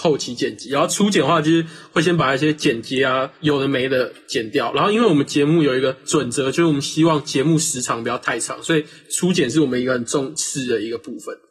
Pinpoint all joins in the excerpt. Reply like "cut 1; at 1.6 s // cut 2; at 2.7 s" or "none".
none

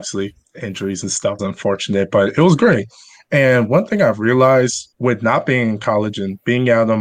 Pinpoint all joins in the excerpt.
cut 1; at 1.4 s // cut 2; at 4.9 s

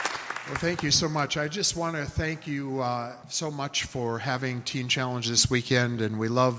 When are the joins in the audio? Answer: cut 1; at 3.2 s

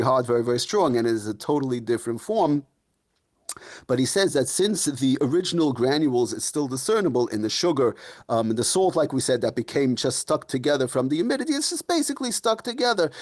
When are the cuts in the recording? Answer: none

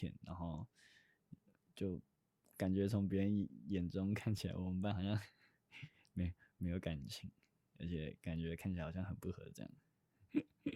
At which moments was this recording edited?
none

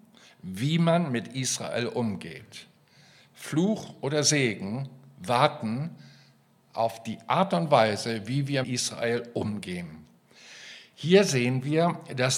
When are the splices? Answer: cut 1; at 8.6 s

